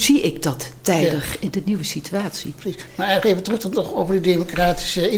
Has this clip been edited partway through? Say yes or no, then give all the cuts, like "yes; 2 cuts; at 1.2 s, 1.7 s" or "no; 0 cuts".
no; 0 cuts